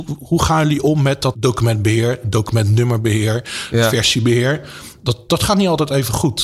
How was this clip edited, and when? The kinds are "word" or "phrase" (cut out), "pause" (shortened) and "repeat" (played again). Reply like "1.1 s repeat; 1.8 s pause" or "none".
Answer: 1.3 s phrase